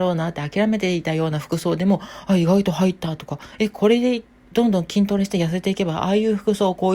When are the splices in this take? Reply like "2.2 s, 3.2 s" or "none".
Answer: none